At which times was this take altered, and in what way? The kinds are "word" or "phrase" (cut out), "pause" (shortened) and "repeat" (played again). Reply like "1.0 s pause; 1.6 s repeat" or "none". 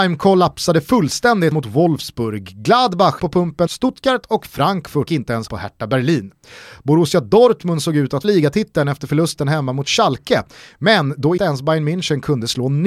1.5 s word; 3.2 s word; 3.7 s word; 5.1 s word; 5.5 s word; 8.2 s word; 11.4 s word